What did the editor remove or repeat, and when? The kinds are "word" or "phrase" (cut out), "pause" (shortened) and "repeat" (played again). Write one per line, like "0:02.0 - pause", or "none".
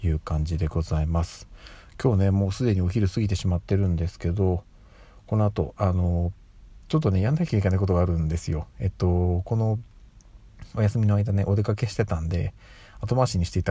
none